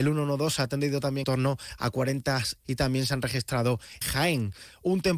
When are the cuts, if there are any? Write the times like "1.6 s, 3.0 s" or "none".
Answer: 1.2 s, 2.6 s, 4.0 s